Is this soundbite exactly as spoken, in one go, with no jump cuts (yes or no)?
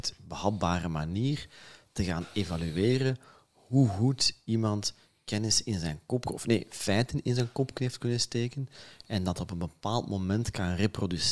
yes